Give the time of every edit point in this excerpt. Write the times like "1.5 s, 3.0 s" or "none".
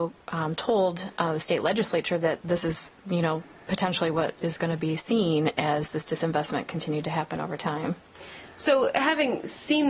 none

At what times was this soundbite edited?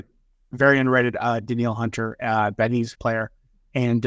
2.9 s

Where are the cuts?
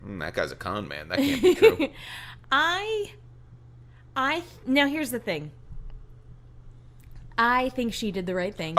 2.4 s, 4.6 s

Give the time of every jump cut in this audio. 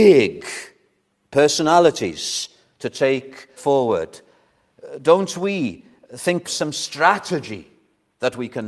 3.6 s, 6.4 s

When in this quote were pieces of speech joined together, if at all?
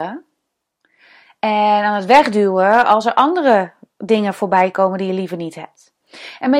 none

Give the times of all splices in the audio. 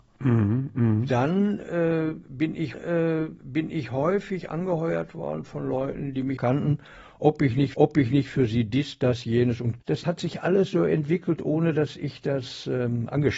2.7 s, 6.4 s, 7.7 s, 9.8 s

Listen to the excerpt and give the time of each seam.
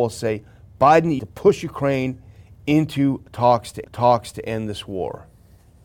1.2 s, 3.8 s

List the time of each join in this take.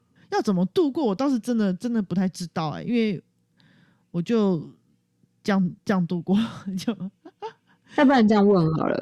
none

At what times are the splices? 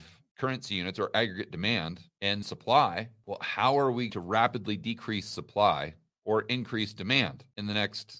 2.4 s, 4.1 s

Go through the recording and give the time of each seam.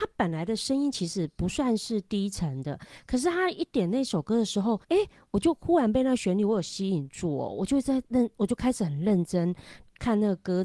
4.8 s

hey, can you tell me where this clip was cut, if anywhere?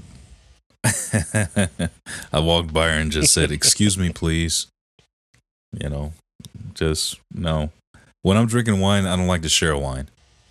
none

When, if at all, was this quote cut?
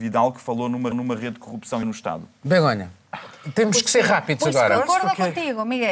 0.9 s, 1.8 s

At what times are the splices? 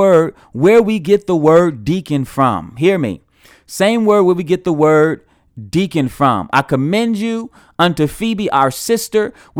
none

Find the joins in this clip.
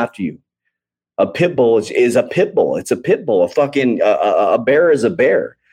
none

